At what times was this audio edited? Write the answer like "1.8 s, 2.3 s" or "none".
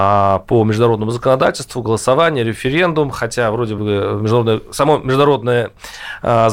none